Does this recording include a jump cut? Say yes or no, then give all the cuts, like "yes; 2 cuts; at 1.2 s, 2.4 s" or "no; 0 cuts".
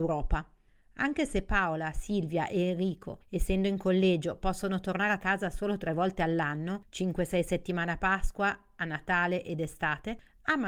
no; 0 cuts